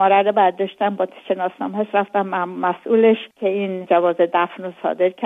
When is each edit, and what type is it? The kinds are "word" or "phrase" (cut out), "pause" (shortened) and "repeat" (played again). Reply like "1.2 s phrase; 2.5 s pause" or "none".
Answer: 3.3 s pause